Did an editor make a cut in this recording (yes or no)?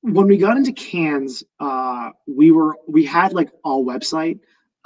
yes